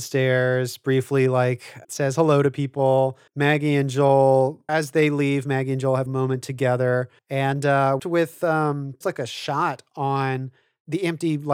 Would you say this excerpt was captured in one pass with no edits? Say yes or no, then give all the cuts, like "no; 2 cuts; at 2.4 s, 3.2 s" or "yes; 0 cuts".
no; 7 cuts; at 1.8 s, 3.3 s, 4.7 s, 6.1 s, 7.2 s, 8.0 s, 9.0 s